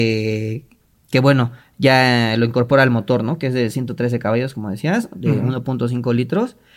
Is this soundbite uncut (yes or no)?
yes